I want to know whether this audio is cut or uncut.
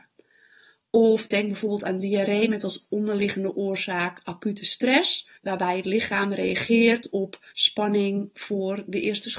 cut